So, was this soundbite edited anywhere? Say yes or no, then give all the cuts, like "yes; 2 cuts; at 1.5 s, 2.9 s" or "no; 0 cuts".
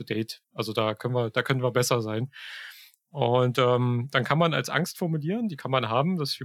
no; 0 cuts